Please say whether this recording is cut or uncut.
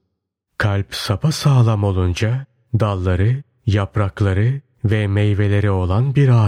uncut